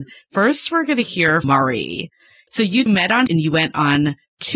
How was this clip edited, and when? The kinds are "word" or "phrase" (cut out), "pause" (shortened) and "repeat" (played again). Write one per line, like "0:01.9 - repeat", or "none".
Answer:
0:01.4 - word
0:02.9 - word
0:03.3 - word